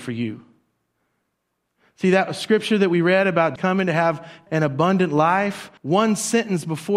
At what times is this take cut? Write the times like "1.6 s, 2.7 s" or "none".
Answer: 3.6 s, 4.5 s, 5.8 s

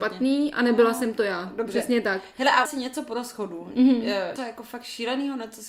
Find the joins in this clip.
2.6 s, 4.4 s

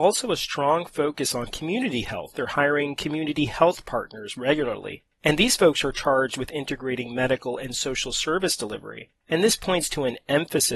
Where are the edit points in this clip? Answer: none

